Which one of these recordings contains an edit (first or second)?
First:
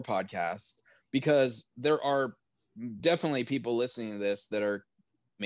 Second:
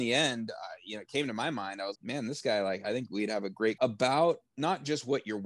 second